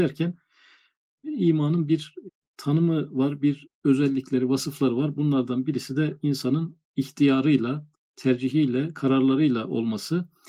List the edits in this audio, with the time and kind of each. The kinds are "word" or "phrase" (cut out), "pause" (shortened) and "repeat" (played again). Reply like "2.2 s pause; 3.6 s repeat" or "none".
none